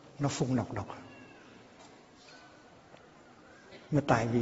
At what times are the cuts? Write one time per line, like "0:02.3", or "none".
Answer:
none